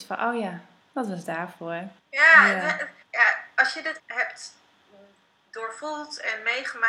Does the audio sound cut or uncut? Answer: cut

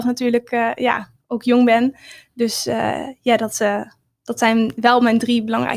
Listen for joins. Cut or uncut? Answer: uncut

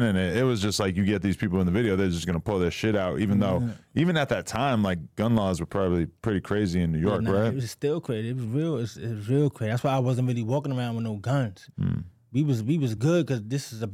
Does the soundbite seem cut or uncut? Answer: uncut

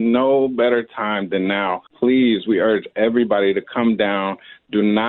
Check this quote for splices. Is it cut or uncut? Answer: cut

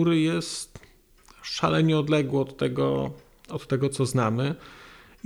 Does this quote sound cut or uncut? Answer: uncut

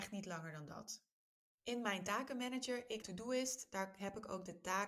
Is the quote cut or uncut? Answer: cut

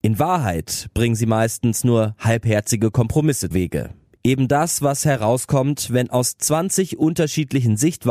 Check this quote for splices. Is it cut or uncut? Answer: cut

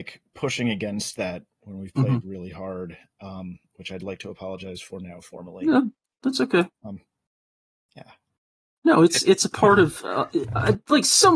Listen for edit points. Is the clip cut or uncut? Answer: uncut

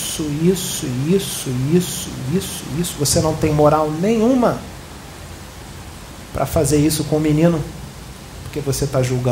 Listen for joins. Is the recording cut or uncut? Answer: uncut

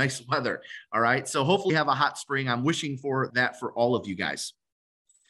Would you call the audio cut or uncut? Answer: cut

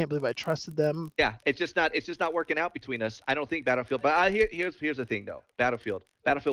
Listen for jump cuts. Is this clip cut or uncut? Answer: uncut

